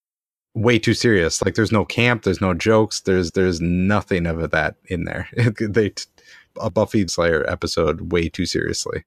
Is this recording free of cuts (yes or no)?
no